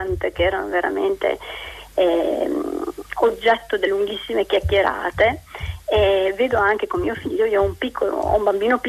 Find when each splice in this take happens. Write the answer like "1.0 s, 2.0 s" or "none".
3.9 s